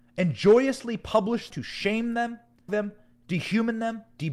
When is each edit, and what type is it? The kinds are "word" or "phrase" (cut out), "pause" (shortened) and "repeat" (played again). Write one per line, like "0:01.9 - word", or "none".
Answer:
0:01.5 - word
0:02.7 - phrase